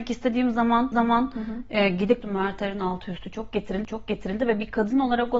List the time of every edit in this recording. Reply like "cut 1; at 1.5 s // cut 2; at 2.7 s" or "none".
cut 1; at 0.9 s // cut 2; at 2.2 s // cut 3; at 3.8 s